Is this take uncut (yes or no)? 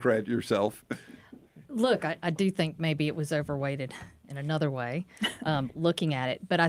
yes